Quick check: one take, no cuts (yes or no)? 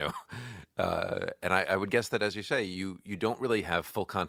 yes